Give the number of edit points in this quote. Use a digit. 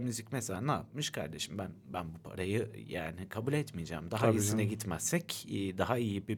0